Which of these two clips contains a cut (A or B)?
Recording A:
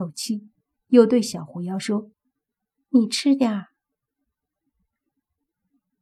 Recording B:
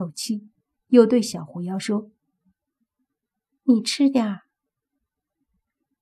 A